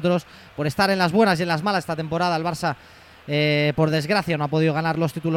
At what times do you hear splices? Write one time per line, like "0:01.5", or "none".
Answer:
none